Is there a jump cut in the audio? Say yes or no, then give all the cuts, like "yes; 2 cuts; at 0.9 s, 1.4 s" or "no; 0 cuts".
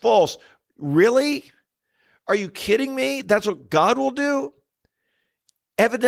no; 0 cuts